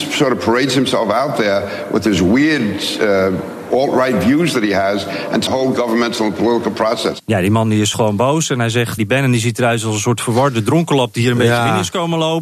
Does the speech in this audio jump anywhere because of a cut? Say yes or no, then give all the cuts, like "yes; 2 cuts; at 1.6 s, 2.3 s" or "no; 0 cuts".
yes; 4 cuts; at 5.5 s, 7.2 s, 7.9 s, 9.0 s